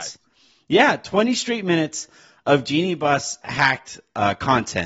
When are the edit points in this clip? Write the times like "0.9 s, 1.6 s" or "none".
none